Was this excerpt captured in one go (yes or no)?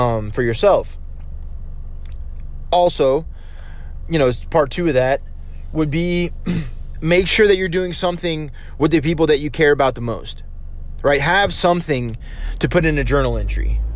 no